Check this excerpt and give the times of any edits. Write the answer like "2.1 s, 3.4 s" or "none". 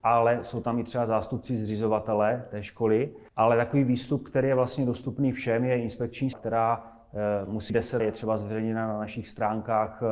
3.3 s, 6.3 s, 7.7 s, 8.0 s